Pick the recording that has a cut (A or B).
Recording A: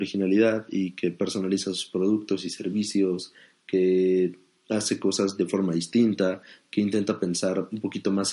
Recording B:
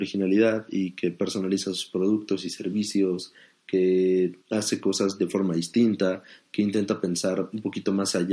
B